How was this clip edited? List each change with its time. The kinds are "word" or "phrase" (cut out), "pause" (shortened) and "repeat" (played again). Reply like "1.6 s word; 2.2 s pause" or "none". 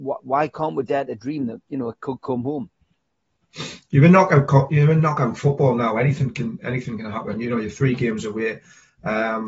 none